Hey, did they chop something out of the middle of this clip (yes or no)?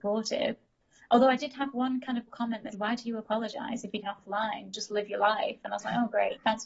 yes